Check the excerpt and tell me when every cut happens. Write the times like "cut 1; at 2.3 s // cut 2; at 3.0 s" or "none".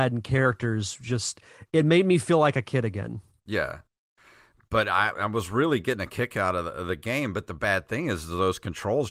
none